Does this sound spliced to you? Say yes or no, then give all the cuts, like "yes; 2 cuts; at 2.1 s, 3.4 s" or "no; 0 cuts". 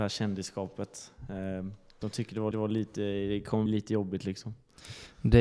yes; 2 cuts; at 2.5 s, 3.7 s